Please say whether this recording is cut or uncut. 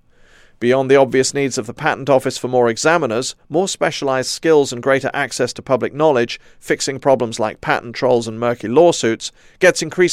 uncut